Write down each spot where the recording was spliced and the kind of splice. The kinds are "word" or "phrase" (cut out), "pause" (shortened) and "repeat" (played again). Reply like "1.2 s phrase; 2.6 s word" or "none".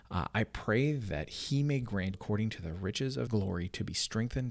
2.1 s word; 3.3 s word